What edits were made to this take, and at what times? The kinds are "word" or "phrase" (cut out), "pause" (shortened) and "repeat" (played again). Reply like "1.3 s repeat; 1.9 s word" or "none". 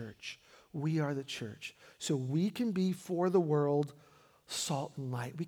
none